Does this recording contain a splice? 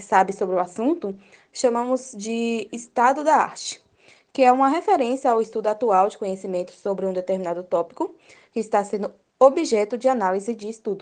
no; 0 cuts

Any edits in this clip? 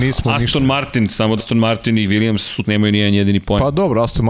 yes; 2 cuts; at 1.4 s, 2.6 s

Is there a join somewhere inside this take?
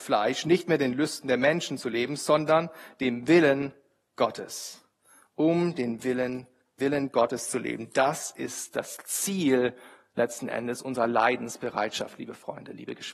yes; 1 cut; at 6.8 s

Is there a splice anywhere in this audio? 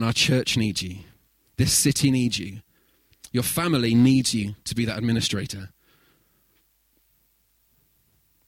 no; 0 cuts

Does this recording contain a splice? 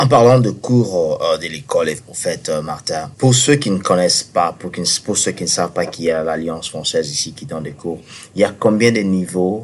yes; 1 cut; at 3.1 s

